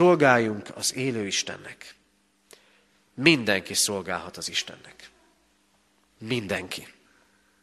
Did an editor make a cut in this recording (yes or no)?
no